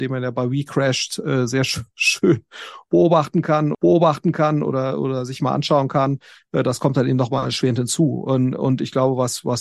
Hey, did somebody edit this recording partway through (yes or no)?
yes